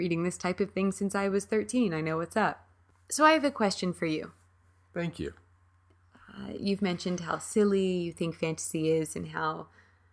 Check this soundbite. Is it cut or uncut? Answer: uncut